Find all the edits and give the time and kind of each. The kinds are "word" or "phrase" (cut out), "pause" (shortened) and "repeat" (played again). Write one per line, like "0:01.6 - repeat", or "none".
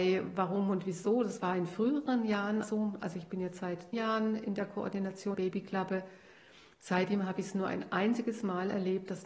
0:02.6 - phrase
0:03.9 - word
0:05.3 - word